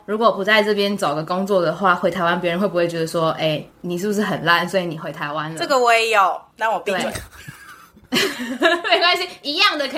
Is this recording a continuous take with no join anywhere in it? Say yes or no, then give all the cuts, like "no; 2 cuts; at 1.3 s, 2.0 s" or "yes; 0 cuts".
no; 1 cut; at 3.7 s